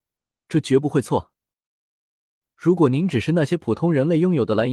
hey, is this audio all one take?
yes; 0 cuts

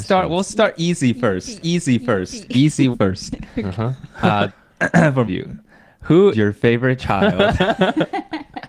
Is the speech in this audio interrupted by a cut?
yes; 5 cuts; at 1.6 s, 2.9 s, 4.5 s, 5.3 s, 6.3 s

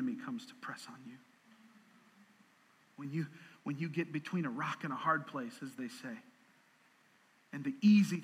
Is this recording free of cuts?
yes; 0 cuts

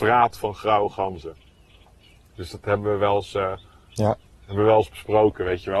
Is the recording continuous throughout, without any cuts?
yes; 0 cuts

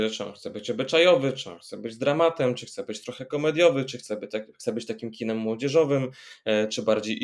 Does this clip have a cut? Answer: no; 0 cuts

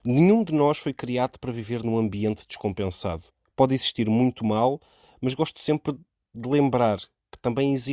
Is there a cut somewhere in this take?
yes; 1 cut; at 3.3 s

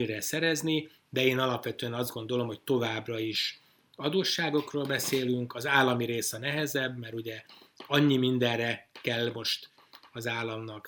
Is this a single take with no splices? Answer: yes; 0 cuts

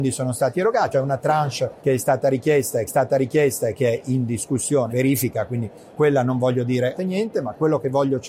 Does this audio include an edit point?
yes; 6 cuts; at 0.9 s, 1.8 s, 2.9 s, 4.9 s, 6.0 s, 7.0 s

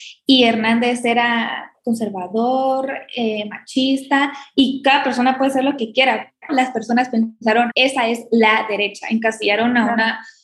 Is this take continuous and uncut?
no; 2 cuts; at 6.5 s, 7.7 s

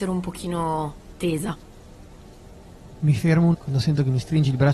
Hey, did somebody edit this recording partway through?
yes; 1 cut; at 3.5 s

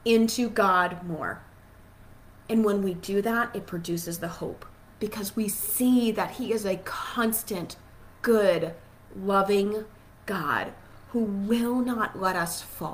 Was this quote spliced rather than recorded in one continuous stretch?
no; 0 cuts

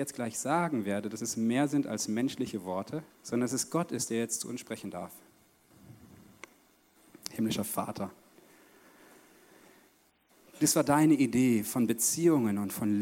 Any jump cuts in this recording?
yes; 1 cut; at 3.1 s

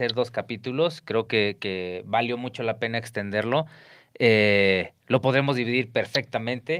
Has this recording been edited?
no; 0 cuts

